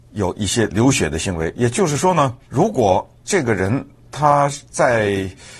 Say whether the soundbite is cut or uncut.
cut